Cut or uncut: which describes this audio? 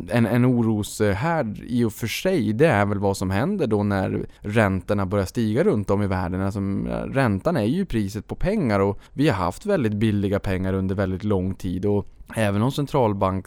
cut